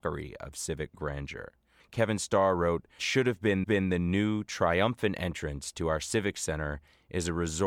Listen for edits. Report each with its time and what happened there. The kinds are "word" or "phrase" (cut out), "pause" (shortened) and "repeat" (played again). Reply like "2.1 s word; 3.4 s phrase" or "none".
1.8 s pause; 3.0 s word; 3.6 s repeat